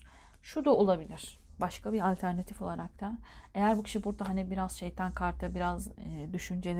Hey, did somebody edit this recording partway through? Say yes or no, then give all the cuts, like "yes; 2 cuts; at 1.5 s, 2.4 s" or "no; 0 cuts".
no; 0 cuts